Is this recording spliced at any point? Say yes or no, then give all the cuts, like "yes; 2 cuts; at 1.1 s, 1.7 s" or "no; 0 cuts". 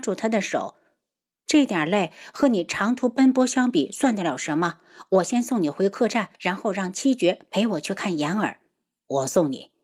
yes; 1 cut; at 6.3 s